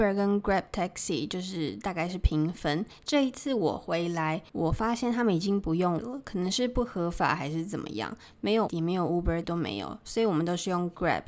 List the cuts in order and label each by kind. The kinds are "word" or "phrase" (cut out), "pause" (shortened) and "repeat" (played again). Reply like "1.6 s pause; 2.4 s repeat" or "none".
4.5 s pause; 6.0 s word; 8.7 s phrase; 9.4 s word

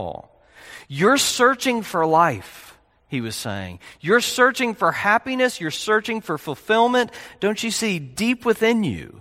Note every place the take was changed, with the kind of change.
none

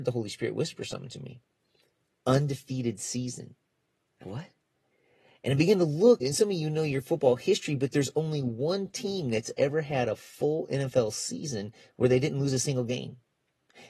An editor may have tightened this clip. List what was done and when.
4.2 s word; 6.2 s word

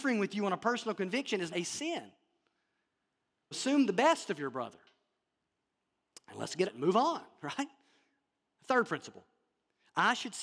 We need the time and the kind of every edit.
1.5 s word; 3.5 s word; 6.6 s word

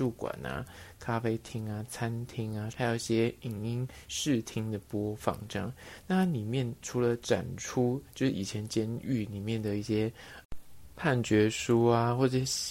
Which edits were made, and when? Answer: 2.7 s phrase

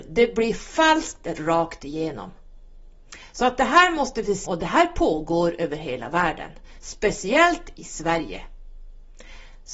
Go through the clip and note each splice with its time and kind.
4.4 s word

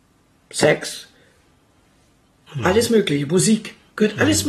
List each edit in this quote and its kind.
none

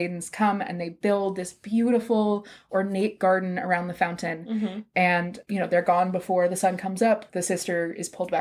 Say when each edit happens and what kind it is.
none

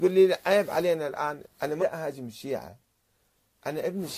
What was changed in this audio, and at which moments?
1.4 s word; 1.8 s word

